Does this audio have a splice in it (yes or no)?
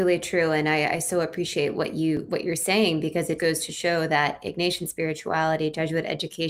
yes